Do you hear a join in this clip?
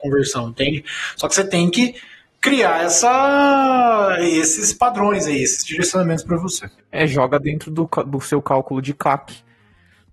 no; 0 cuts

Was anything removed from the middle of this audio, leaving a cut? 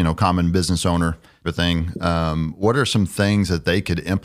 yes; 1 cut; at 1.4 s

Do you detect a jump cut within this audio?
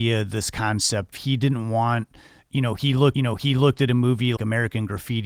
yes; 3 cuts; at 1.1 s, 3.1 s, 4.4 s

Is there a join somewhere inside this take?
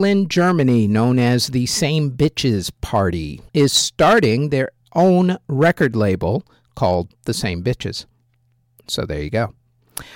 yes; 1 cut; at 3.5 s

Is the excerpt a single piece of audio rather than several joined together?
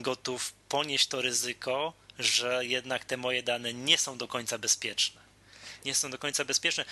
yes; 0 cuts

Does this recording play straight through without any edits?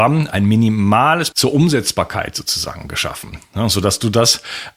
no; 1 cut; at 1.3 s

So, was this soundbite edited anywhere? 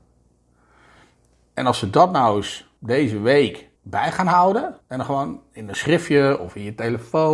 yes; 3 cuts; at 2.8 s, 3.8 s, 4.8 s

